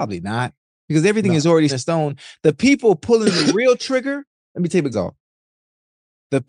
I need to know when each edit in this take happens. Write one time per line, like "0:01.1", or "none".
0:01.7
0:04.4
0:04.9